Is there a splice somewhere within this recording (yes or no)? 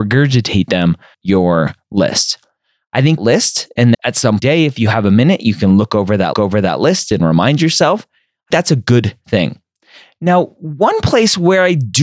yes